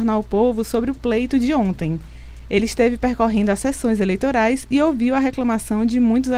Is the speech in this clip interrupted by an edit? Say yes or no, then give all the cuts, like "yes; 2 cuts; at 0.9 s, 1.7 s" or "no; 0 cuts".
no; 0 cuts